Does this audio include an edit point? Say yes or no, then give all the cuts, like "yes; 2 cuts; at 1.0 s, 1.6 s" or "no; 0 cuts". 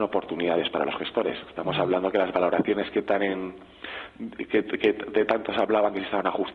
no; 0 cuts